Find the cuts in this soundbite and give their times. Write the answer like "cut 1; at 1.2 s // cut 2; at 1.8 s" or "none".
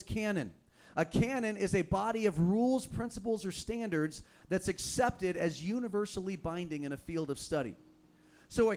none